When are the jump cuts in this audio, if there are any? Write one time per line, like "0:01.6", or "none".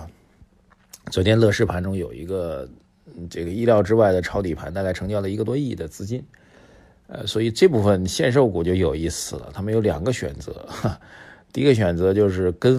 none